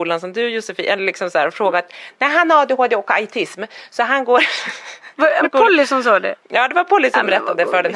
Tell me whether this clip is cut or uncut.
cut